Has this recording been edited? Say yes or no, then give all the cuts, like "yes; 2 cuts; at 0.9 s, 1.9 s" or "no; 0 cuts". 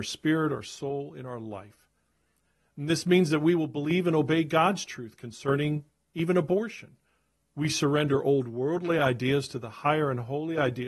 no; 0 cuts